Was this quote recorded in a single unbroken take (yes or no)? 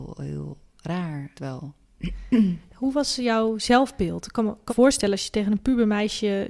no